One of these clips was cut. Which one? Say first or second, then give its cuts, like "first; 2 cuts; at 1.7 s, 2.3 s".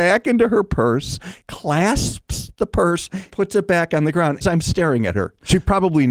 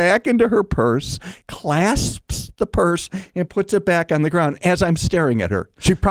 first; 2 cuts; at 3.3 s, 4.4 s